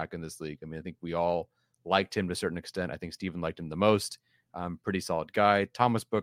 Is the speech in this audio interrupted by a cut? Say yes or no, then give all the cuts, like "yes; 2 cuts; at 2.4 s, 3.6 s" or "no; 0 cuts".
no; 0 cuts